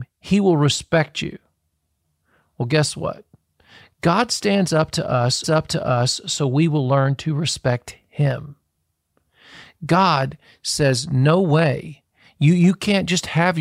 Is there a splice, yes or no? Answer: yes